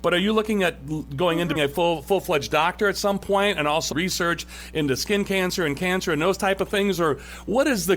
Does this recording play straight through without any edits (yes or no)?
no